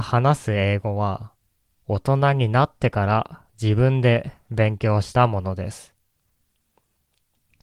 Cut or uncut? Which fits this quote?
cut